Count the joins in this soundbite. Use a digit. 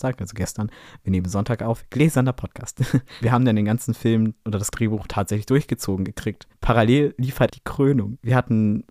2